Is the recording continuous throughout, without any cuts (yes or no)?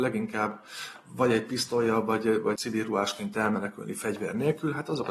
no